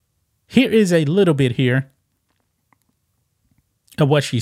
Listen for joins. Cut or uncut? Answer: uncut